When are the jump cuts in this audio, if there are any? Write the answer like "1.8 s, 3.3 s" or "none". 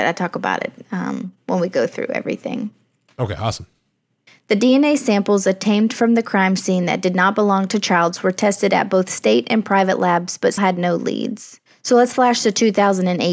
10.6 s